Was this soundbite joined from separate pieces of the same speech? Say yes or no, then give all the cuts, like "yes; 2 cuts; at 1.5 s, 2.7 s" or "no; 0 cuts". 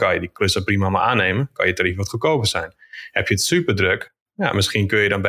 no; 0 cuts